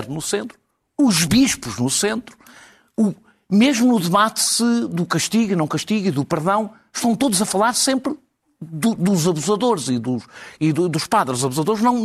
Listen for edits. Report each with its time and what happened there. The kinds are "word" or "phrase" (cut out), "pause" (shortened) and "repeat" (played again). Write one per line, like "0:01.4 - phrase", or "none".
none